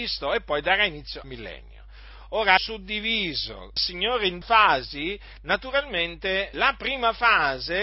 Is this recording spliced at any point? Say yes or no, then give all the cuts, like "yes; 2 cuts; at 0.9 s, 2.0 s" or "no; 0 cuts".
yes; 5 cuts; at 1.2 s, 2.6 s, 3.8 s, 4.4 s, 6.5 s